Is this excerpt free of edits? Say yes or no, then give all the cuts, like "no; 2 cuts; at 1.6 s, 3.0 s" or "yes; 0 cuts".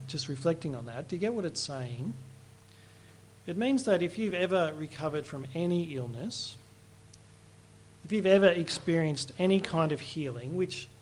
yes; 0 cuts